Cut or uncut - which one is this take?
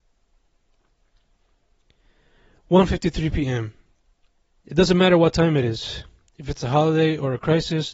uncut